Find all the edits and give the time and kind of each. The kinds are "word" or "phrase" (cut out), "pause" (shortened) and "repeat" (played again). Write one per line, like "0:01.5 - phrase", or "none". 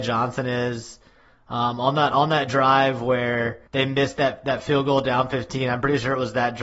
0:03.7 - pause